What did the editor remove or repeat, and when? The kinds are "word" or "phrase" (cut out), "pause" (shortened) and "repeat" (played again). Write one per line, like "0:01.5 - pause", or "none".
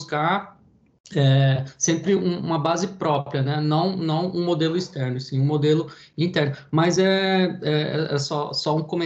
none